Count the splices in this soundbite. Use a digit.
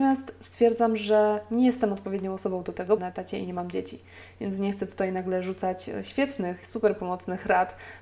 2